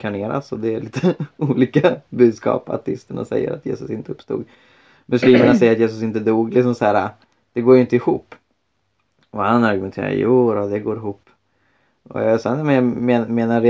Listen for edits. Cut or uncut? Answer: uncut